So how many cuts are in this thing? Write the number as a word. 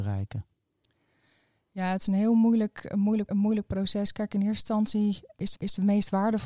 two